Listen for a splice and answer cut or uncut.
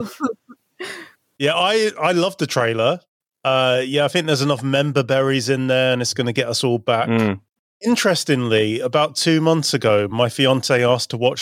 uncut